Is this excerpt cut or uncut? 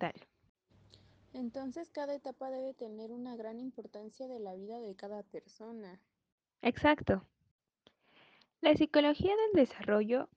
uncut